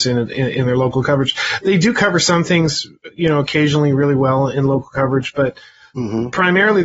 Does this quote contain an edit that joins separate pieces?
no; 0 cuts

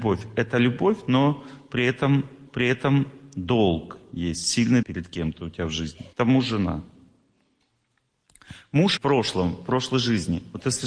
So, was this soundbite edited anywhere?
yes; 4 cuts; at 2.5 s, 4.8 s, 6.1 s, 9.0 s

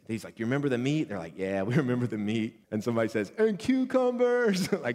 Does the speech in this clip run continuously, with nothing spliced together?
no; 1 cut; at 2.6 s

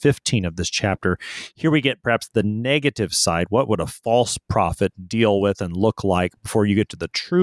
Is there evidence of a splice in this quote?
no; 0 cuts

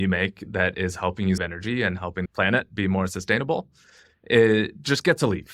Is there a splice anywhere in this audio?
yes; 2 cuts; at 1.4 s, 2.3 s

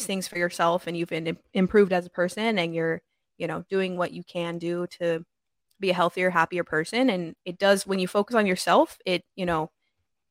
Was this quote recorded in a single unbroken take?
yes; 0 cuts

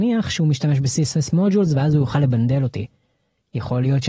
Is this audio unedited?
yes; 0 cuts

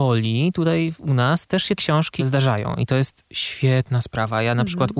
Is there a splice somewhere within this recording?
yes; 2 cuts; at 1.8 s, 2.2 s

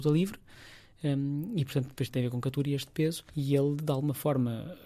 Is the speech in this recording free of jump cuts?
no; 2 cuts; at 2.1 s, 3.3 s

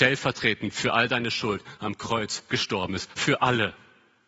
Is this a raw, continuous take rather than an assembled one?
yes; 0 cuts

